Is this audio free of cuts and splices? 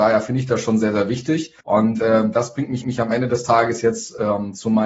no; 2 cuts; at 1.6 s, 2.8 s

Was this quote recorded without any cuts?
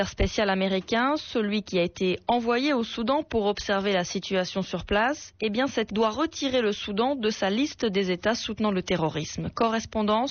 no; 1 cut; at 5.9 s

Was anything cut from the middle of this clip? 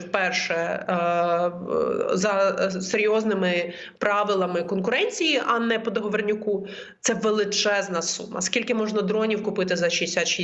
no; 0 cuts

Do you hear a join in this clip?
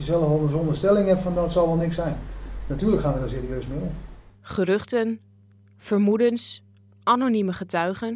no; 0 cuts

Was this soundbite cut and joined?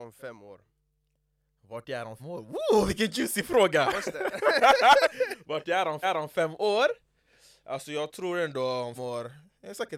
yes; 3 cuts; at 2.2 s, 6.0 s, 9.0 s

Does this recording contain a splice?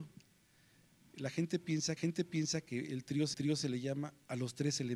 yes; 2 cuts; at 2.0 s, 3.3 s

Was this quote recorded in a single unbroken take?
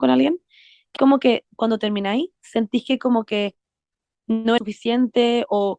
no; 2 cuts; at 1.0 s, 4.6 s

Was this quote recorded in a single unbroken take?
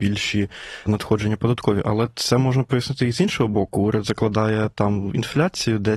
yes; 0 cuts

